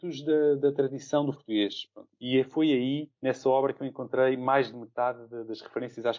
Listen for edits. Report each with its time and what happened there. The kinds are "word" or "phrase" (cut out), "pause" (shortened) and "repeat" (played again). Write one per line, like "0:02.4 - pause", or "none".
0:01.3 - word
0:03.2 - pause